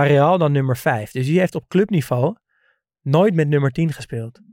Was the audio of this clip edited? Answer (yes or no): no